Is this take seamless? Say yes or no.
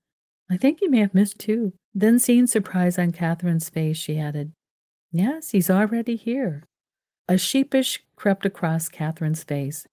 no